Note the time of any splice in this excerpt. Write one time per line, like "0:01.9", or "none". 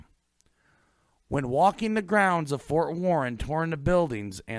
none